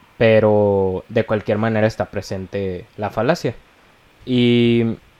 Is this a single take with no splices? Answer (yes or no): no